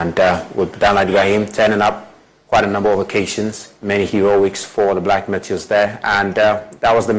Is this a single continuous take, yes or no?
yes